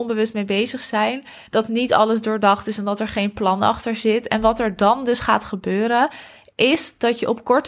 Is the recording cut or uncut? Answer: uncut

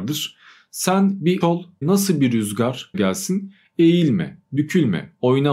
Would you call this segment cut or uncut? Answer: cut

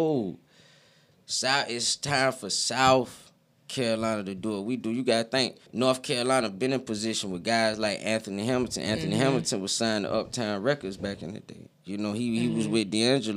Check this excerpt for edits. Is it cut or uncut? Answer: cut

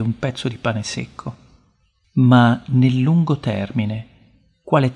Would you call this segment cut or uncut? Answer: uncut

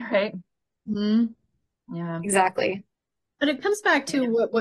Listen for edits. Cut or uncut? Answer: uncut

